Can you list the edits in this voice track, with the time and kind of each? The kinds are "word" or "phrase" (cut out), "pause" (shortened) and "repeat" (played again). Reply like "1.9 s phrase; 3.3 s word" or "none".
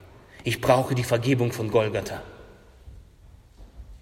none